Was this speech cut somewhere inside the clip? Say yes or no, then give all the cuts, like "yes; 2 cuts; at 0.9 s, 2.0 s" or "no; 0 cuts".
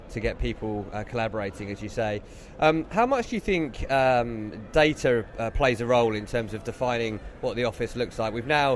no; 0 cuts